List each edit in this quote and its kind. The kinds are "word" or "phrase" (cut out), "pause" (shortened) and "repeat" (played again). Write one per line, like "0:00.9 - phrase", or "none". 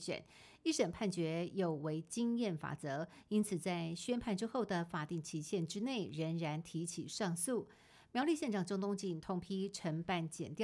none